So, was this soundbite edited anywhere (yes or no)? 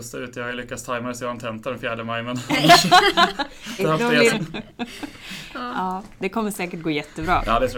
yes